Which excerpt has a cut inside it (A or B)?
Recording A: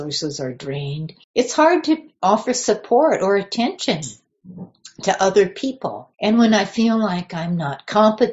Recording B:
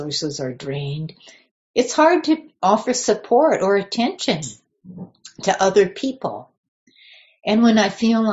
A